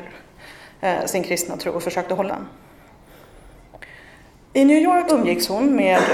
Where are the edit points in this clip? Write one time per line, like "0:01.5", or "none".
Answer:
0:02.3
0:05.1